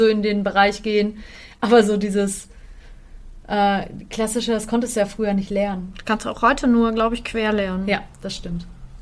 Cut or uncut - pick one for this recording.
uncut